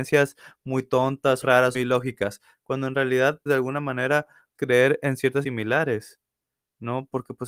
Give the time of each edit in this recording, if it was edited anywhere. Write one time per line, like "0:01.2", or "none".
0:01.4
0:01.7
0:03.5
0:04.5
0:05.4